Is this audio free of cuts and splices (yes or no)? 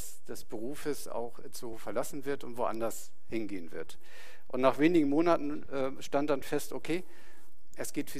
yes